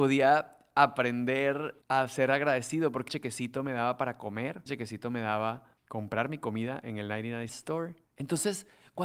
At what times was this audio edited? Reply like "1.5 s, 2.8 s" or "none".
1.8 s, 3.1 s, 4.7 s, 5.9 s, 7.5 s, 8.0 s

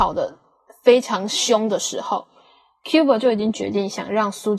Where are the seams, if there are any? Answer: none

